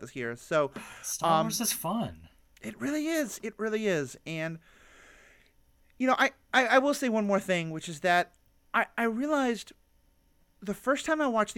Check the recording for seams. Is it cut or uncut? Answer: uncut